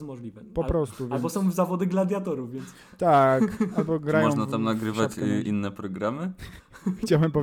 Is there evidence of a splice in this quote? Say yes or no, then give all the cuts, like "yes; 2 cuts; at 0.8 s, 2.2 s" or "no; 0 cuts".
no; 0 cuts